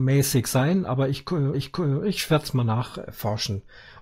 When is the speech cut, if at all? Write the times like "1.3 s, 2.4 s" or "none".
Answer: 1.5 s